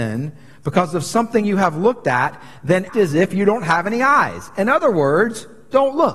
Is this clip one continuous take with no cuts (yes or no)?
no